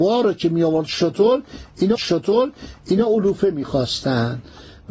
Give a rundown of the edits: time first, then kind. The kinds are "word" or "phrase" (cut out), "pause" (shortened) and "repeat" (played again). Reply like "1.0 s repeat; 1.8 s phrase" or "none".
2.0 s repeat